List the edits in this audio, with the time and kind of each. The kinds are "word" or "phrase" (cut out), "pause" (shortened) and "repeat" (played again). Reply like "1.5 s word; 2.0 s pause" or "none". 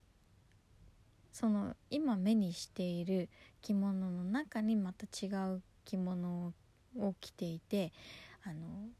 none

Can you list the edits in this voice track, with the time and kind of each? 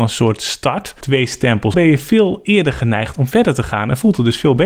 1.0 s word; 1.7 s phrase

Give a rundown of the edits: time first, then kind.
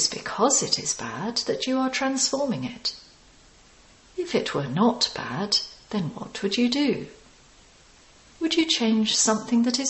none

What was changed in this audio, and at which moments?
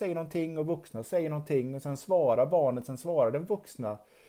none

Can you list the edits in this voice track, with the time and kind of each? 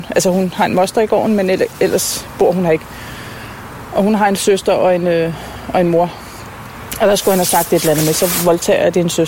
none

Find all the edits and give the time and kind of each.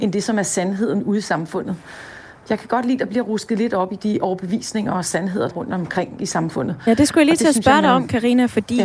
5.5 s word

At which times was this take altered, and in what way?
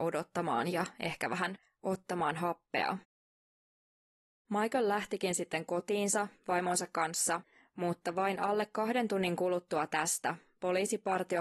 none

